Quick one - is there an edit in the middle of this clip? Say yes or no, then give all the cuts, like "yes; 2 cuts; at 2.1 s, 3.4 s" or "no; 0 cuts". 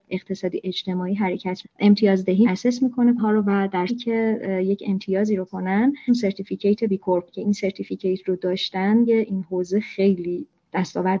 yes; 8 cuts; at 1.6 s, 2.4 s, 3.2 s, 3.9 s, 5.5 s, 6.1 s, 7.3 s, 9.1 s